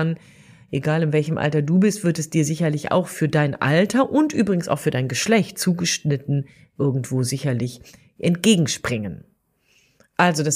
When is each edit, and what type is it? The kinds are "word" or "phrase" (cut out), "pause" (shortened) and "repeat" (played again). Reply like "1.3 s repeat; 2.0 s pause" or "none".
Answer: none